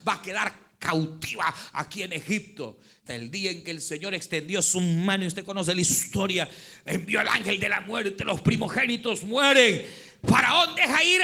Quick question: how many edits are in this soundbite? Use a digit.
1